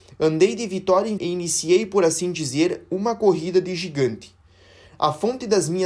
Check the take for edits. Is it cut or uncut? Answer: cut